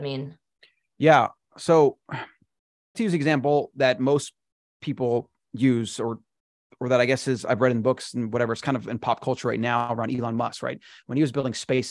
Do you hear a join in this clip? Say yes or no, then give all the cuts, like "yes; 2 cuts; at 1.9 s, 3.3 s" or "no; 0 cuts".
yes; 1 cut; at 2.9 s